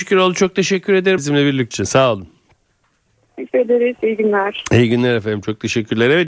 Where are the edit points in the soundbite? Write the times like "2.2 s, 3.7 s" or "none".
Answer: 1.2 s, 1.7 s, 3.5 s